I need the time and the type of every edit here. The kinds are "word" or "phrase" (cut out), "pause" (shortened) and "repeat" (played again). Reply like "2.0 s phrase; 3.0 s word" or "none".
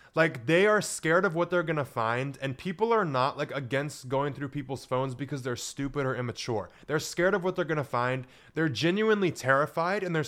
none

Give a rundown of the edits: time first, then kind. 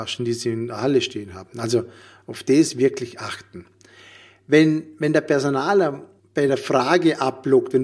none

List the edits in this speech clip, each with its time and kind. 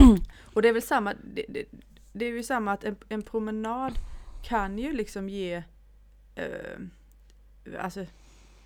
none

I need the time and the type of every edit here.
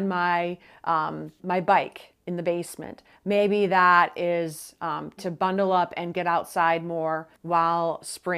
1.4 s word; 2.2 s pause; 5.2 s word; 7.3 s pause

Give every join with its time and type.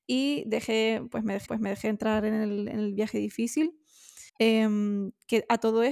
1.5 s repeat; 4.3 s pause

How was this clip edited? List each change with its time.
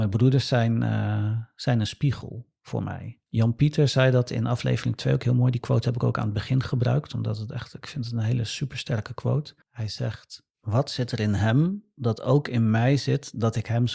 3.3 s pause; 9.6 s pause; 10.5 s pause

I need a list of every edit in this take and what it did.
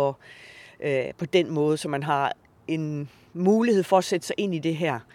none

